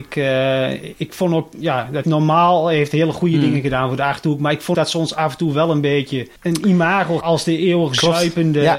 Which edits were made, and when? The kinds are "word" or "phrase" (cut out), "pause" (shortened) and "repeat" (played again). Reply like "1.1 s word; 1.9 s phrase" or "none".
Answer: 0.9 s word; 2.0 s word; 4.7 s word; 6.4 s pause; 7.2 s word